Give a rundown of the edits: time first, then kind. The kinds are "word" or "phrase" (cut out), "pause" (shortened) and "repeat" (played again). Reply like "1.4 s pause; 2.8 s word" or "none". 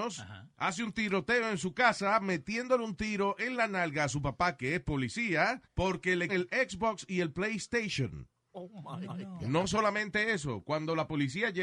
5.6 s pause; 6.3 s word; 9.1 s repeat